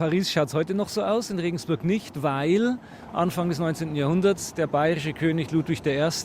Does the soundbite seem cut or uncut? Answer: uncut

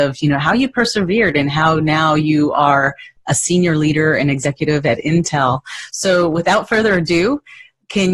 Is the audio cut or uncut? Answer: uncut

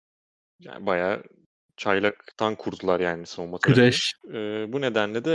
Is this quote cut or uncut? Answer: cut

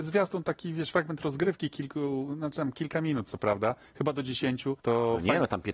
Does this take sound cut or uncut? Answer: cut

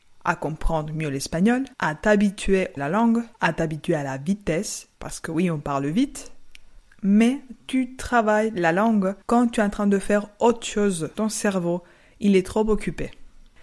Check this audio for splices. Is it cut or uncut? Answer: cut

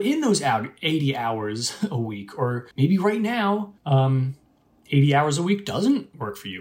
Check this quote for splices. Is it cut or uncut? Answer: cut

